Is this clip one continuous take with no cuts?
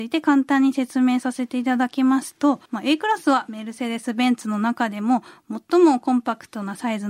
no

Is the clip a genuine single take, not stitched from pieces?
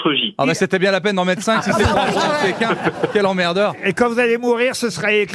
yes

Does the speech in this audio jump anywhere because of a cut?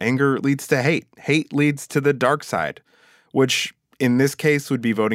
no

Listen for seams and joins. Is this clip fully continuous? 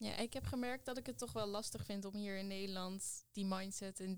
no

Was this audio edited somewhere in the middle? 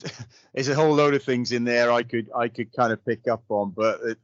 no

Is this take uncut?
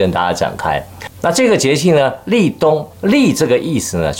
no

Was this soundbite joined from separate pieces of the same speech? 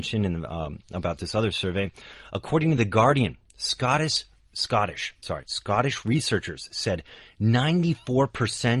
no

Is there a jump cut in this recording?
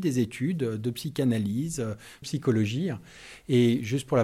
yes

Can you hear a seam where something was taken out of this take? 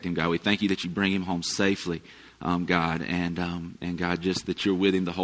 no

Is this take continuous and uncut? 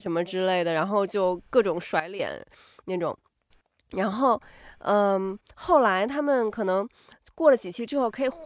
yes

